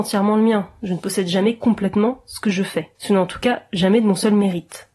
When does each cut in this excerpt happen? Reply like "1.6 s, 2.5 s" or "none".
2.9 s

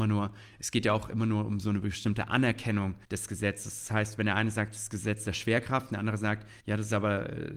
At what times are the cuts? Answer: 3.0 s, 6.6 s

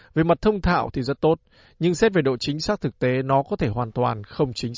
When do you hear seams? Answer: none

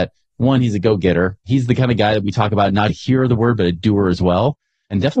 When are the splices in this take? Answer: 2.9 s

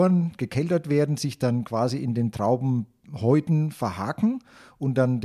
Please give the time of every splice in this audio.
none

